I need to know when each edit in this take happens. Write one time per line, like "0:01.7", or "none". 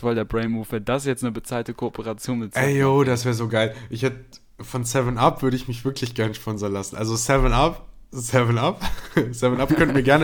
none